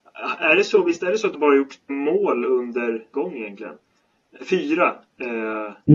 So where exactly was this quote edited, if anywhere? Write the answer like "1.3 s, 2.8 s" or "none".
1.3 s, 1.9 s, 3.1 s